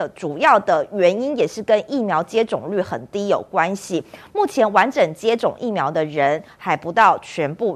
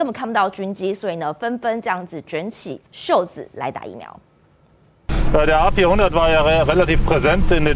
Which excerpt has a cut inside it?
second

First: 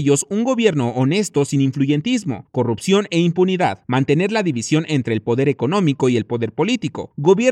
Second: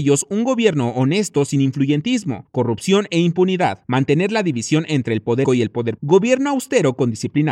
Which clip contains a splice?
second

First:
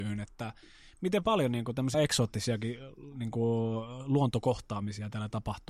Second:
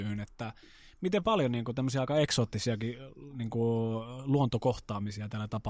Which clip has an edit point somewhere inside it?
first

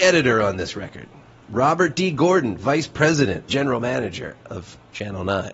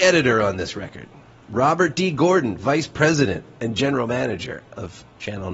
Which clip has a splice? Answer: first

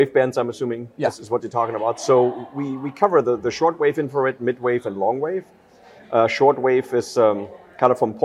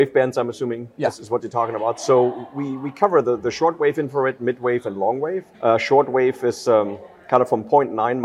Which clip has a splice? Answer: second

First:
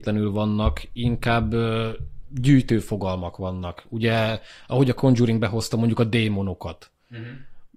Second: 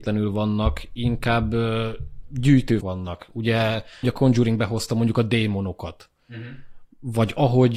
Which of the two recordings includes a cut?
second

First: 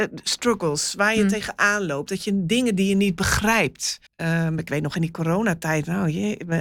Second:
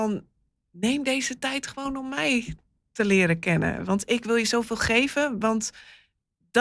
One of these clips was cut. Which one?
first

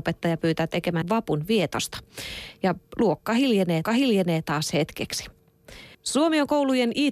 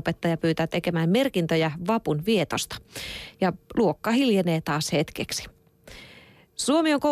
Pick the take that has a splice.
first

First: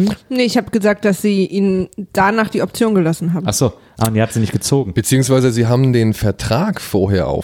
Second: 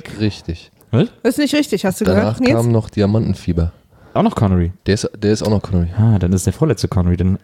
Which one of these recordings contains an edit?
second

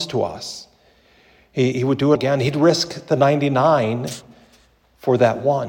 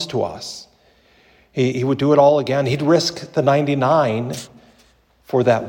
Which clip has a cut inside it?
first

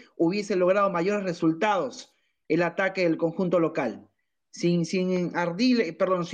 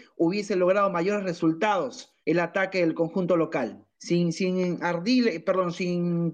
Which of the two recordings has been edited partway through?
second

